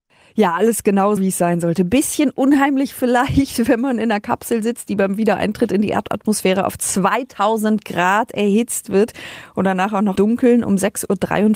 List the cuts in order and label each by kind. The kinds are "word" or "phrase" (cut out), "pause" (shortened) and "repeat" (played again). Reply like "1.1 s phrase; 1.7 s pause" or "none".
1.2 s word; 10.2 s word